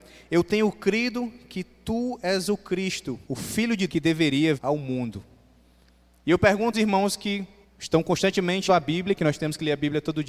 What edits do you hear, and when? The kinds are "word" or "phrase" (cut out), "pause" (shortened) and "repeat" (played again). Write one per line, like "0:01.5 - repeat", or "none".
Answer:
0:03.2 - pause
0:03.9 - word
0:04.6 - word
0:06.7 - word
0:07.6 - pause
0:08.7 - word